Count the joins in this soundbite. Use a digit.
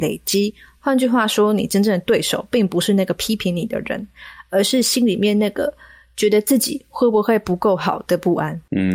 0